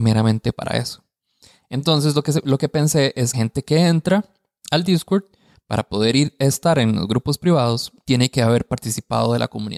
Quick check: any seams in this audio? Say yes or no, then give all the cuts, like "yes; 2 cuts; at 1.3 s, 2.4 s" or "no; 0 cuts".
yes; 1 cut; at 3.3 s